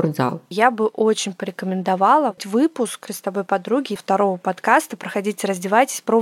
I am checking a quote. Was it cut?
yes; 3 cuts; at 2.4 s, 3.1 s, 4.0 s

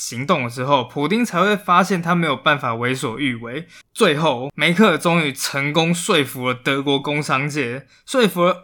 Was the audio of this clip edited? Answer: yes; 1 cut; at 3.8 s

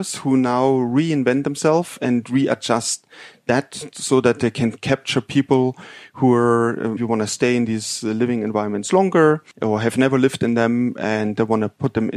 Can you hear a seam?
yes; 2 cuts; at 7.0 s, 9.5 s

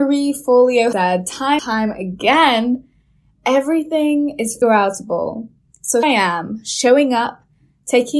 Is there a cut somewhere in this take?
yes; 4 cuts; at 0.9 s, 1.6 s, 4.6 s, 6.0 s

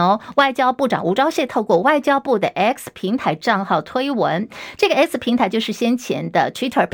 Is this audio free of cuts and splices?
yes; 0 cuts

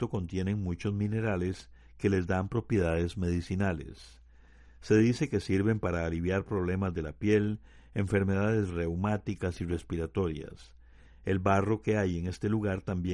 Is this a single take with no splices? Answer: yes; 0 cuts

